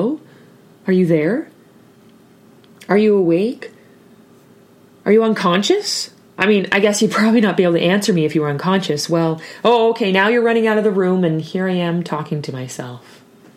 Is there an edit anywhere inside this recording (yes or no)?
no